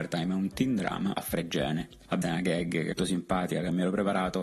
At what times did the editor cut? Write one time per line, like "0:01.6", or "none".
0:01.1
0:02.2
0:03.0